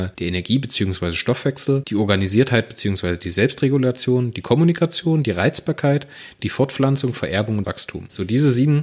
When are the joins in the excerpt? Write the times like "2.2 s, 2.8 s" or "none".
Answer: 7.6 s